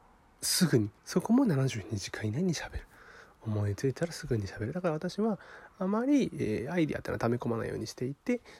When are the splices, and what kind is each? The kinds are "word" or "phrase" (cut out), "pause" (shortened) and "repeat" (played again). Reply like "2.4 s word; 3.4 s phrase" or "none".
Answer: 1.0 s pause